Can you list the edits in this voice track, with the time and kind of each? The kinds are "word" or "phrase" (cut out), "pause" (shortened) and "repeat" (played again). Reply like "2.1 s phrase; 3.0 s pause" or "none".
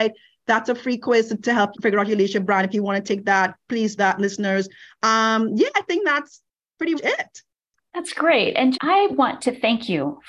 1.7 s word; 4.0 s phrase; 7.0 s word; 8.7 s word